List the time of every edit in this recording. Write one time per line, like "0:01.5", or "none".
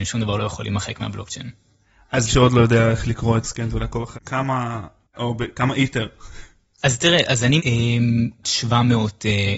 0:02.3
0:03.4
0:04.1
0:05.1
0:06.8
0:07.6
0:08.4